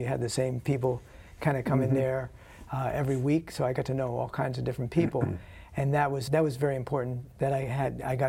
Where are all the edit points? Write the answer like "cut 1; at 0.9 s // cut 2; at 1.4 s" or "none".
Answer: cut 1; at 6.3 s